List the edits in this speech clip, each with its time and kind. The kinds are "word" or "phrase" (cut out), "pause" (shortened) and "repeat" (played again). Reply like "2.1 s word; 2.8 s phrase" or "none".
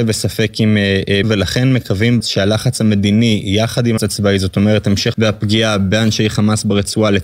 1.2 s word; 2.2 s word; 4.0 s word; 5.1 s word